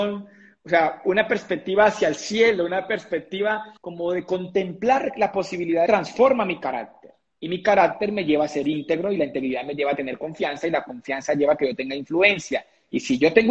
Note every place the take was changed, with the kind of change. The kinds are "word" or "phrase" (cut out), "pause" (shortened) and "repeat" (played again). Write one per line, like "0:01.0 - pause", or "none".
0:03.8 - pause
0:05.9 - phrase